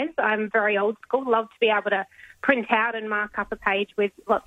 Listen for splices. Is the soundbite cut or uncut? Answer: uncut